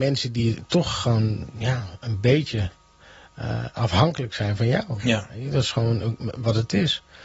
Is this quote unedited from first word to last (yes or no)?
yes